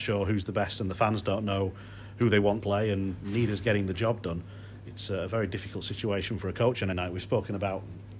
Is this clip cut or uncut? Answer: cut